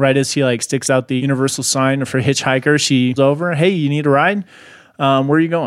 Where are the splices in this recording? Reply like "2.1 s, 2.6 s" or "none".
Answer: 3.2 s